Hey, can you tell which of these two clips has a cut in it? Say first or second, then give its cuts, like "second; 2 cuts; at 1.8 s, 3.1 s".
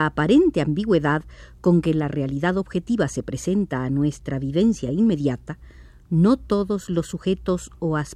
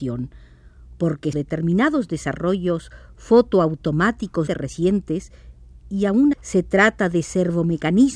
second; 3 cuts; at 1.3 s, 4.5 s, 6.3 s